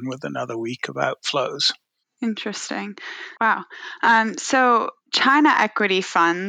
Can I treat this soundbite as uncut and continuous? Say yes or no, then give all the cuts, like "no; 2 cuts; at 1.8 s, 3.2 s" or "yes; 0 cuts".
no; 2 cuts; at 3.4 s, 5.0 s